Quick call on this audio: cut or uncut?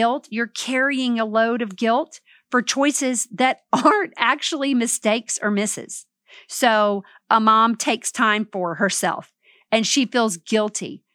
uncut